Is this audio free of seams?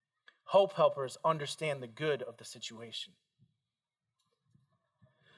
yes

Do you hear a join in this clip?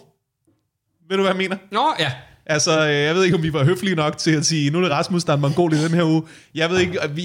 no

